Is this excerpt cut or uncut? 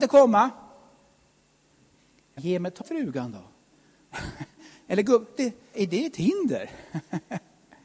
cut